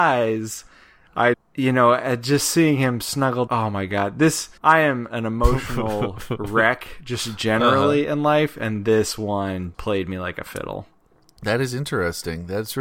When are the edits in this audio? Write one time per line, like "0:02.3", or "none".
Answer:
0:01.3
0:03.5
0:04.6
0:09.7